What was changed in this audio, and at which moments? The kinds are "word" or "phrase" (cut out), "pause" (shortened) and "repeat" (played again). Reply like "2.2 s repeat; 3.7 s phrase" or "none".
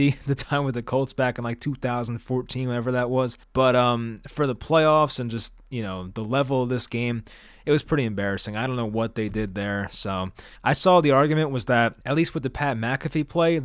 3.4 s pause; 10.6 s pause; 12.0 s pause